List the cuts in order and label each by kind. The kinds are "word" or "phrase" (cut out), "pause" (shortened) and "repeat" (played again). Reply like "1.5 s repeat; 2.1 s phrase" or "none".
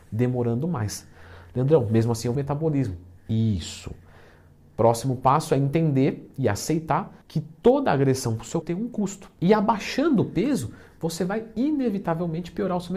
2.4 s phrase; 3.2 s pause; 7.2 s pause; 8.6 s word